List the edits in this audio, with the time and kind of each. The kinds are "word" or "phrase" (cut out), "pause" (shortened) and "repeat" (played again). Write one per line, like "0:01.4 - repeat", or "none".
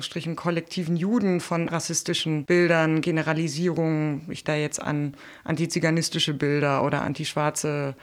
0:01.7 - word
0:04.4 - word